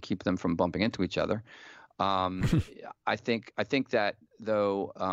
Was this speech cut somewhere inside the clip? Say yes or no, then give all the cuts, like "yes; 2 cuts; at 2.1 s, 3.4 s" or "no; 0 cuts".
no; 0 cuts